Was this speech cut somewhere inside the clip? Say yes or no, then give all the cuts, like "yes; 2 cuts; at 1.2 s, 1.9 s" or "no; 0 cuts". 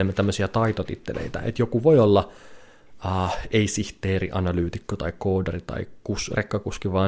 no; 0 cuts